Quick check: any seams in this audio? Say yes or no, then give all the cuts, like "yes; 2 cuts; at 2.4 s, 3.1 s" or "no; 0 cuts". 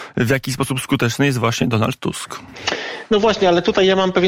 no; 0 cuts